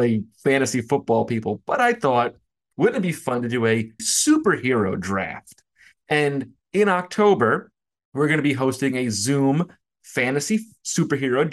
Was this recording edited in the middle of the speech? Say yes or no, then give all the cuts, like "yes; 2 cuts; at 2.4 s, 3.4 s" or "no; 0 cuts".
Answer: yes; 1 cut; at 4.0 s